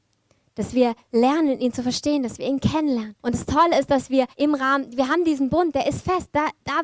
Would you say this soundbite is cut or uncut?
cut